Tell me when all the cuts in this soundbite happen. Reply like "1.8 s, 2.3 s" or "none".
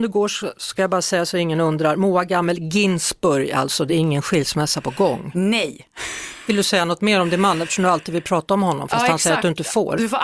none